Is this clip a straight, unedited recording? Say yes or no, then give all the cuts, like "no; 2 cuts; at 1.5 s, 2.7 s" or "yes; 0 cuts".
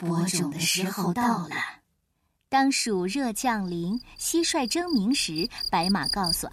yes; 0 cuts